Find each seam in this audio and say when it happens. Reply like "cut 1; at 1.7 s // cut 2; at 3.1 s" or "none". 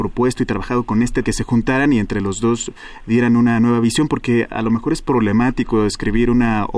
cut 1; at 1.2 s